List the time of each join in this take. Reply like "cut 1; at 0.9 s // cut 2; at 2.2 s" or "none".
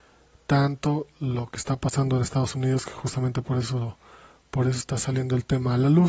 none